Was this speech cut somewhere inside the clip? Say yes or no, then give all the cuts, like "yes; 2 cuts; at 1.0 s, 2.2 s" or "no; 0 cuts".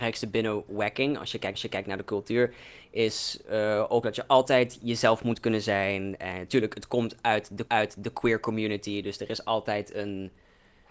yes; 2 cuts; at 1.5 s, 7.7 s